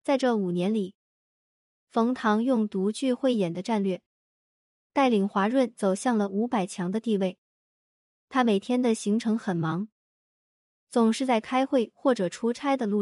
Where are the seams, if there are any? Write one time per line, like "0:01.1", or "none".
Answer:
none